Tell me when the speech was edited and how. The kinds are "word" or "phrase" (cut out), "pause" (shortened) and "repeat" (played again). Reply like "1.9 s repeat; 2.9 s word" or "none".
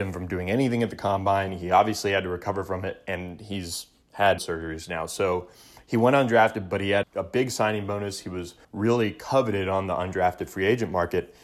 4.4 s phrase; 7.0 s word; 8.6 s pause

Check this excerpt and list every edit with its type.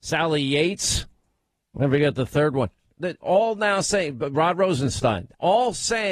none

